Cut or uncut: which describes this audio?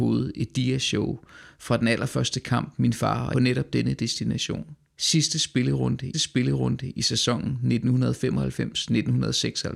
cut